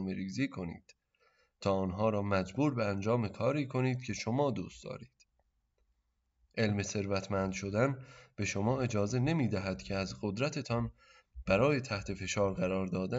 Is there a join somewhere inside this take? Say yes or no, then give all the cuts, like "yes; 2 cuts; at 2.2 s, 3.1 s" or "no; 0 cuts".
no; 0 cuts